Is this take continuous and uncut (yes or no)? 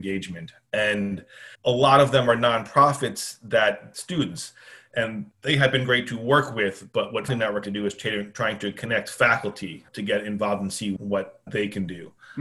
no